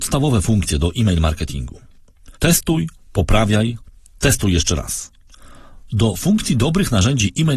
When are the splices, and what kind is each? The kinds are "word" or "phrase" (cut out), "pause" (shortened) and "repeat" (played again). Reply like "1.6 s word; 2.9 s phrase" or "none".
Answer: 2.4 s pause